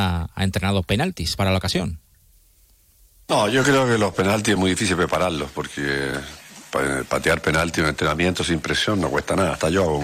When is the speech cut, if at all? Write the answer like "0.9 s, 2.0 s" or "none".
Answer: none